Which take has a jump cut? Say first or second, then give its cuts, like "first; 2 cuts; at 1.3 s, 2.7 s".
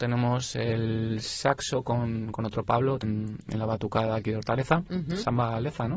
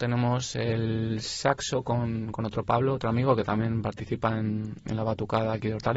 first; 1 cut; at 3.0 s